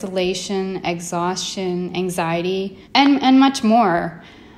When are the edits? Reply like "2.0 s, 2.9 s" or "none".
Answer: 2.8 s